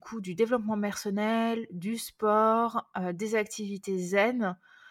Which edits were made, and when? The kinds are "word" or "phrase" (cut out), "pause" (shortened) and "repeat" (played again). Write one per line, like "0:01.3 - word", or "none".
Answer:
none